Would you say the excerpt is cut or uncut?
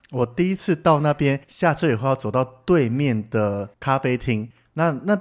cut